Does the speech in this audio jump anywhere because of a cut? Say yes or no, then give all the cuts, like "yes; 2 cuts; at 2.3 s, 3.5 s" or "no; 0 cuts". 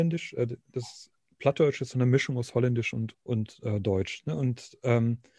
yes; 1 cut; at 3.1 s